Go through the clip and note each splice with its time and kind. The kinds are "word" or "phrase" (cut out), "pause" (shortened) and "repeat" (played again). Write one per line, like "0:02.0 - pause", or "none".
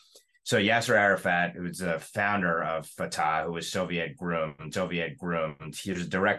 0:04.7 - repeat